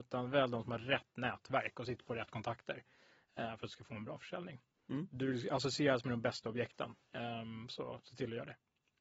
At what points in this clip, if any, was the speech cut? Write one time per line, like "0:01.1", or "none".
none